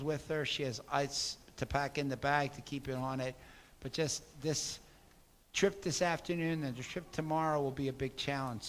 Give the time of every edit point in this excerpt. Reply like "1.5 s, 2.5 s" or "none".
none